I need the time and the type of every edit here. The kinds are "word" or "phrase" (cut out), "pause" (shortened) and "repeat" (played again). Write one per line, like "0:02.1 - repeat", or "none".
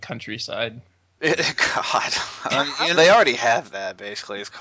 0:02.9 - word